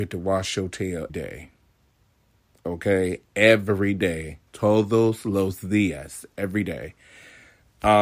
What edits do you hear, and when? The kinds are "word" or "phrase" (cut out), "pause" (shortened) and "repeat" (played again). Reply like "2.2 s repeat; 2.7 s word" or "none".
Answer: 1.1 s word; 4.5 s pause